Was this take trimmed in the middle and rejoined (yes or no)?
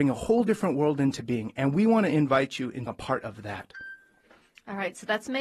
yes